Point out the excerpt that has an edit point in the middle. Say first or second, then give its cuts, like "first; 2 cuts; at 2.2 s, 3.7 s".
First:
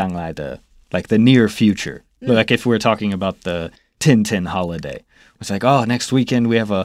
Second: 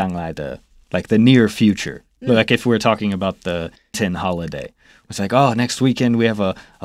second; 1 cut; at 3.9 s